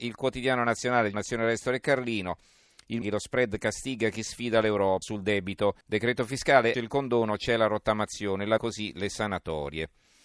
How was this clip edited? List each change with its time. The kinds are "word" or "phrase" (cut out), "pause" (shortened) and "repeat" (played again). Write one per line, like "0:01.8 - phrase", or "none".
0:01.1 - word
0:03.0 - phrase
0:05.0 - phrase
0:05.8 - pause
0:06.7 - word
0:08.6 - word